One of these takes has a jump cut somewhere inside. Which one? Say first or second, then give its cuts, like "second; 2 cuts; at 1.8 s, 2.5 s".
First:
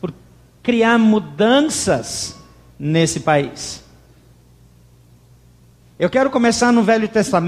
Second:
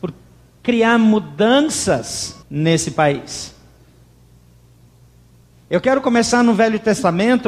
second; 1 cut; at 2.4 s